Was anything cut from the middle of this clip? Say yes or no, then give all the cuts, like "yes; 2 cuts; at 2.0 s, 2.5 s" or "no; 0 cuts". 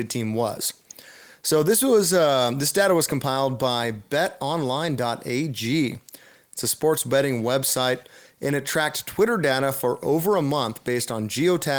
no; 0 cuts